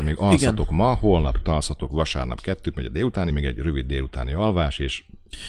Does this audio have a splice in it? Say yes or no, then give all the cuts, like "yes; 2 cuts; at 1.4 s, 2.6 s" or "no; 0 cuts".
yes; 2 cuts; at 1.4 s, 3.3 s